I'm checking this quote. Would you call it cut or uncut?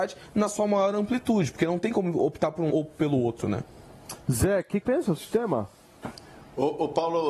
cut